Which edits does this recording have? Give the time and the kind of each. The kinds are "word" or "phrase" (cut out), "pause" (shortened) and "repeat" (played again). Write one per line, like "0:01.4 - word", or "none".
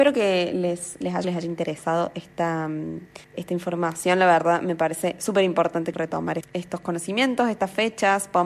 0:01.2 - word
0:03.2 - pause
0:05.9 - word
0:06.4 - word